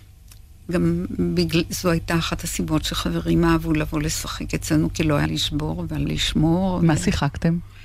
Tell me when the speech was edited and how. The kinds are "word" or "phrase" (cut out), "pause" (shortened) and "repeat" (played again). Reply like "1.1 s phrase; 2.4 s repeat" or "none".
5.3 s phrase; 6.1 s word